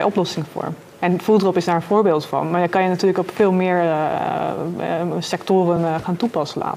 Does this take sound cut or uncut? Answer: uncut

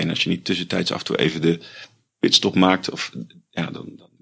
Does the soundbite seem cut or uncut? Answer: uncut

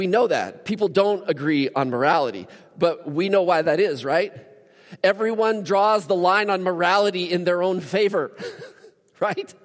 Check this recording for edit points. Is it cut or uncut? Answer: uncut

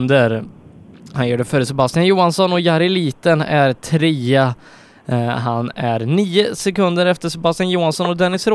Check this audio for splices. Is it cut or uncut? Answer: uncut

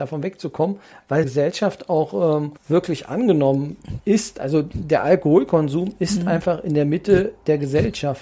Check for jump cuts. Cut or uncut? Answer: cut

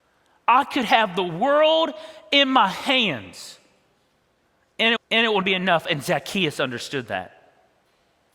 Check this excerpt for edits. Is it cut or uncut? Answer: cut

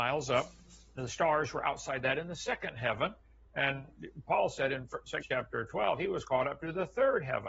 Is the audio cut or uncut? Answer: cut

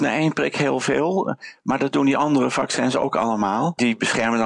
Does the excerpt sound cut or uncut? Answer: uncut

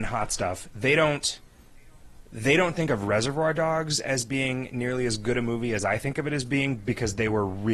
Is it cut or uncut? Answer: uncut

